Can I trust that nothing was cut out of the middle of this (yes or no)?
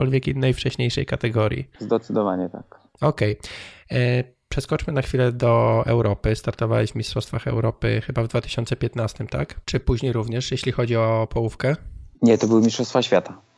no